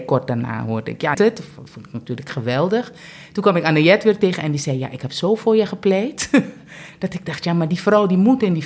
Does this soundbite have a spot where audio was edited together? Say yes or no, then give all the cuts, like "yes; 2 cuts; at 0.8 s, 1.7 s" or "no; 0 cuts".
yes; 1 cut; at 1.1 s